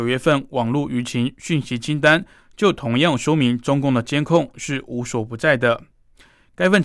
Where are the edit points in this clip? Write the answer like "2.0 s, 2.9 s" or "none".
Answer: none